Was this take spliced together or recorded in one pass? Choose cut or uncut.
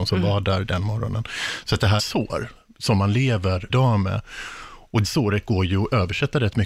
cut